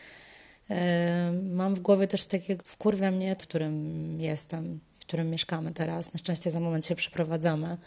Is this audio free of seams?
no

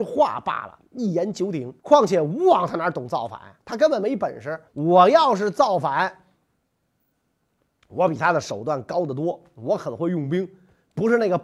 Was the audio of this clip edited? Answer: yes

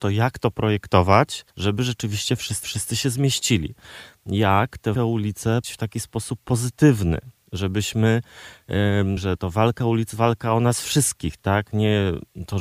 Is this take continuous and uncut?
no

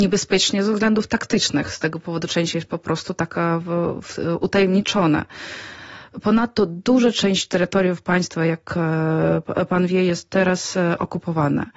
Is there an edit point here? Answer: no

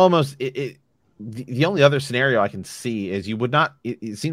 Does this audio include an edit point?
no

